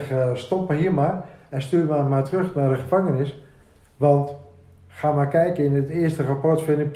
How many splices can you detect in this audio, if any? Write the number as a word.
zero